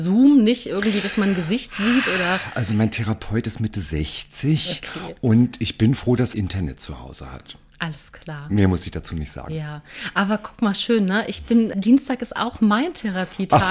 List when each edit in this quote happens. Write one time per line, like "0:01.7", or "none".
0:05.9
0:06.3
0:11.7